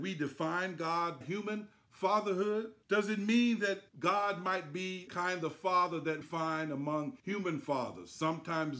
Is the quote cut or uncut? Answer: cut